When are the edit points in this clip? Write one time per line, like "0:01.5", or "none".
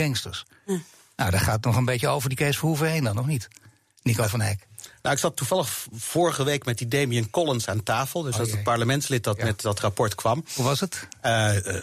none